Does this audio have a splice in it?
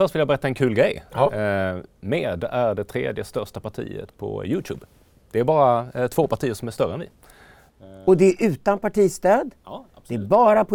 no; 0 cuts

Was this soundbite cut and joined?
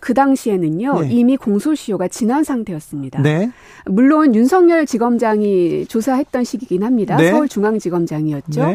no; 0 cuts

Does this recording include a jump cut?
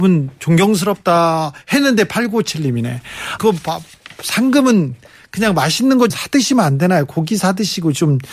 yes; 2 cuts; at 3.4 s, 6.1 s

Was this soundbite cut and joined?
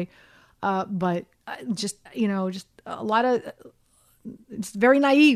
yes; 1 cut; at 2.1 s

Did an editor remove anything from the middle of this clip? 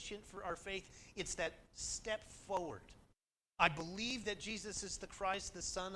no; 0 cuts

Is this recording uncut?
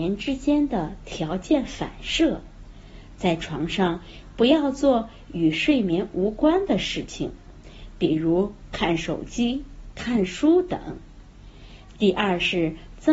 no; 1 cut; at 9.9 s

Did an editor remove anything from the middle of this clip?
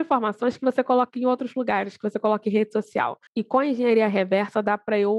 yes; 1 cut; at 3.3 s

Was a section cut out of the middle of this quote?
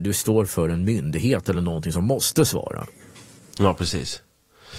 no; 0 cuts

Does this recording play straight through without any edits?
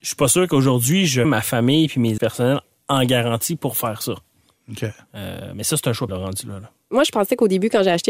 no; 3 cuts; at 1.2 s, 2.2 s, 6.1 s

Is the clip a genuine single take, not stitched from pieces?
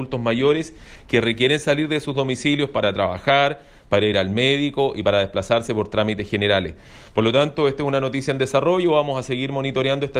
yes; 0 cuts

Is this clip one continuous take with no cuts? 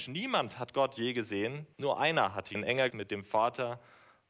no; 3 cuts; at 1.7 s, 2.5 s, 2.9 s

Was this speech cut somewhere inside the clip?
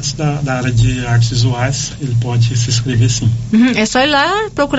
no; 0 cuts

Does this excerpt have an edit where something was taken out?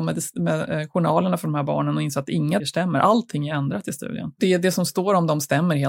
yes; 1 cut; at 2.6 s

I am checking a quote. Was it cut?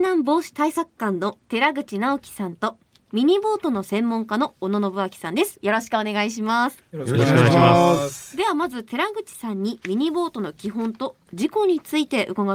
yes; 1 cut; at 1.4 s

